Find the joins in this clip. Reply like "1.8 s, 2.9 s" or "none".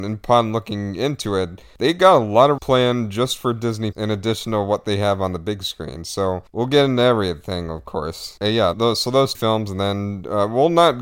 2.6 s, 3.9 s, 8.7 s, 9.3 s